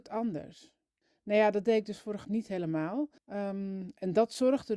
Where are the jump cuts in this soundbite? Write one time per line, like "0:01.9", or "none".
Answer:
0:02.2
0:03.2